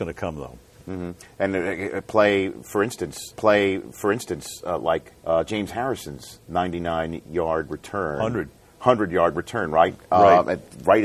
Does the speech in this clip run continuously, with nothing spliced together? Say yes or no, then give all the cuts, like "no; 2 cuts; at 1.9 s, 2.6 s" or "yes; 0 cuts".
no; 2 cuts; at 3.3 s, 5.2 s